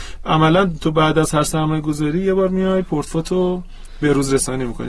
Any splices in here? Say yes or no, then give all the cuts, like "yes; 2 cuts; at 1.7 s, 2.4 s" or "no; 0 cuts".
no; 0 cuts